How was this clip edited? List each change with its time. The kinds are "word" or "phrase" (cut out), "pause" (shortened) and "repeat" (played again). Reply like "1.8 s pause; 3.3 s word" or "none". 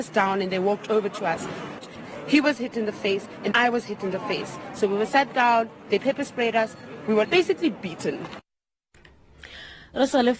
3.5 s word; 7.2 s word